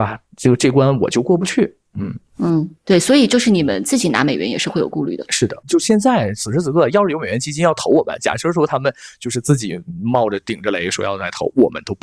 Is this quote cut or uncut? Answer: cut